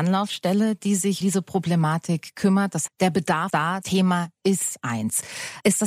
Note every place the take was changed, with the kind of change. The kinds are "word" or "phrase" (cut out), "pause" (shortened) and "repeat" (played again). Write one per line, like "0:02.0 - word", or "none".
0:01.2 - word
0:02.9 - word
0:03.5 - word
0:03.8 - word